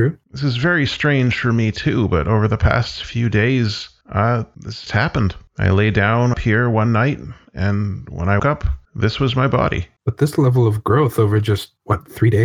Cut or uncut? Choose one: cut